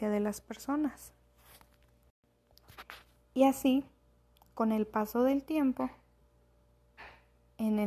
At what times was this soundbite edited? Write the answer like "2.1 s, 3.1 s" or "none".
none